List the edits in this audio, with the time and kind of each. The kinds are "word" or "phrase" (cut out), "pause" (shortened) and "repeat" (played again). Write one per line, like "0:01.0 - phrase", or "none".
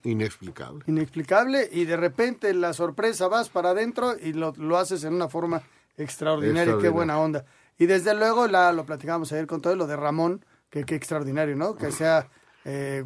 none